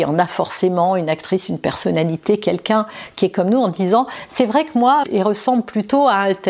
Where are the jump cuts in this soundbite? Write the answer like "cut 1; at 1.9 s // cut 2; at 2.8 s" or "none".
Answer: cut 1; at 5.0 s